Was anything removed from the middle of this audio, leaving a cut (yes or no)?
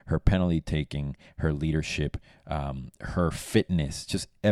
no